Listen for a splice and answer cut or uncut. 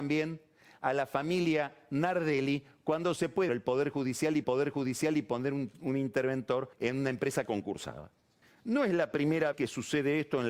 cut